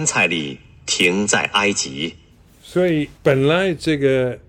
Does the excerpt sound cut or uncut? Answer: cut